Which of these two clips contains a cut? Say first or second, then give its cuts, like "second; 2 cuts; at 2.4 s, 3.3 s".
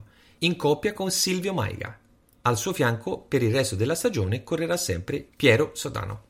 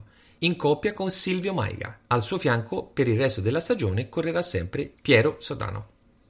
second; 1 cut; at 2.1 s